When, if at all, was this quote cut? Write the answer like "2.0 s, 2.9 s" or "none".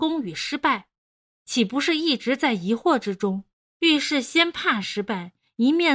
3.5 s

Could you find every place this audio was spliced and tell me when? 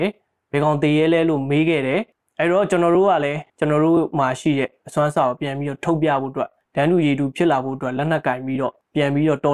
3.5 s

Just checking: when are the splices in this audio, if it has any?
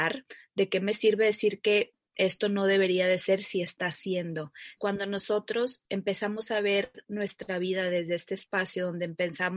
4.8 s

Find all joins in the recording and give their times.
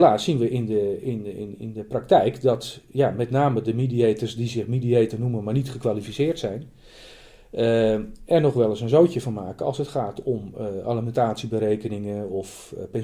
none

